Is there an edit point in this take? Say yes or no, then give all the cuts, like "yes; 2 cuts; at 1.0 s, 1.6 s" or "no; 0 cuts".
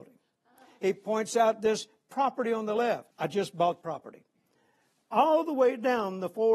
yes; 2 cuts; at 3.1 s, 3.8 s